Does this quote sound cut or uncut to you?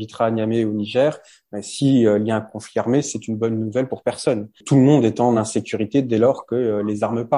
uncut